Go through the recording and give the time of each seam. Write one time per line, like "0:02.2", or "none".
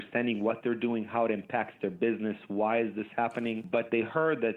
none